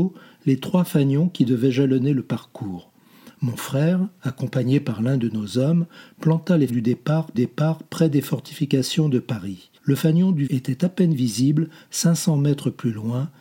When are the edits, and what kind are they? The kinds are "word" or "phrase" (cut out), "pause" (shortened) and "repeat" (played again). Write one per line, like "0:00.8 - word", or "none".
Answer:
0:06.7 - word
0:07.3 - repeat
0:09.8 - pause
0:10.5 - word